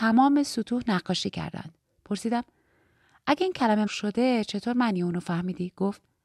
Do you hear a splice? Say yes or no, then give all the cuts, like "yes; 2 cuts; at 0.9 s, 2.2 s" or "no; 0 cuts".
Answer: yes; 1 cut; at 3.9 s